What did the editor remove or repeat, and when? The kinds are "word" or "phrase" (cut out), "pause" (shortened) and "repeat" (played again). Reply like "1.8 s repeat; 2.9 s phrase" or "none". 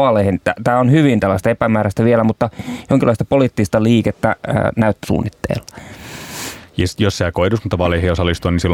5.0 s word